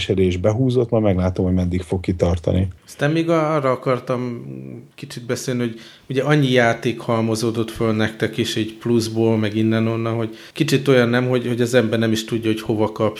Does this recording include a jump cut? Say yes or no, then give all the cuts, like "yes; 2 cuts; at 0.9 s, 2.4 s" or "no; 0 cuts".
yes; 3 cuts; at 2.8 s, 4.9 s, 10.5 s